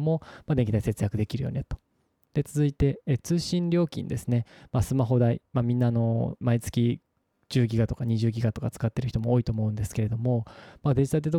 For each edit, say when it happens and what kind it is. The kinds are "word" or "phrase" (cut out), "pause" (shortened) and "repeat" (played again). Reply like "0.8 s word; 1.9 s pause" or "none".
6.4 s word